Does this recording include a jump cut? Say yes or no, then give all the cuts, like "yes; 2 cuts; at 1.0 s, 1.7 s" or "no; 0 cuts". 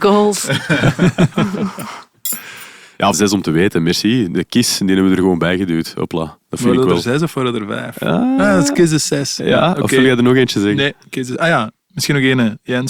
yes; 1 cut; at 3.1 s